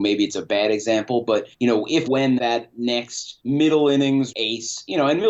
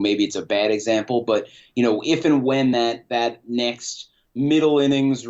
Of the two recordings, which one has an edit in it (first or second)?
first